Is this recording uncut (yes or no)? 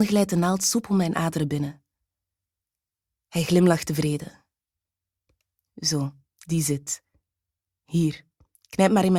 yes